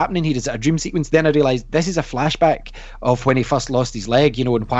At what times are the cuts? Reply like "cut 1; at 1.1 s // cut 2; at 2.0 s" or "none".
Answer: none